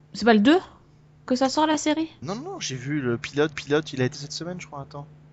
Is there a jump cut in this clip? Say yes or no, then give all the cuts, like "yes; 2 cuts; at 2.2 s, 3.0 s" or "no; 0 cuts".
yes; 3 cuts; at 2.2 s, 3.5 s, 4.1 s